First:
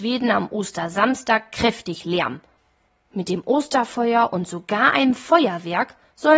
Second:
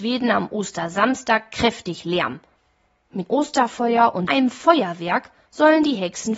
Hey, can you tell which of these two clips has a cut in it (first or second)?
second